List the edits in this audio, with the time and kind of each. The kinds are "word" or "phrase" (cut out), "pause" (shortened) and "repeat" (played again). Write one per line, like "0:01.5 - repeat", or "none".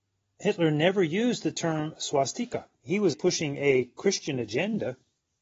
0:02.7 - pause
0:03.1 - word